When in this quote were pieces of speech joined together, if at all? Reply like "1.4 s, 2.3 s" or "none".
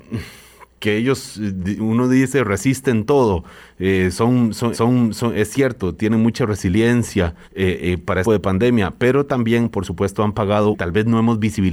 4.7 s, 7.4 s, 8.2 s, 10.7 s